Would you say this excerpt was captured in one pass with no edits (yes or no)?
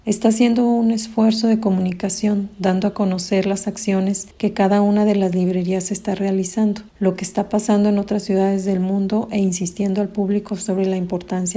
no